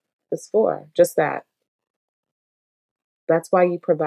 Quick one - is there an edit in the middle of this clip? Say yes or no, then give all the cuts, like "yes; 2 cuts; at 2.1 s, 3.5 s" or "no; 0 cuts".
no; 0 cuts